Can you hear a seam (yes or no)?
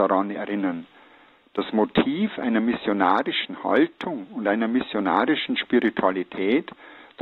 no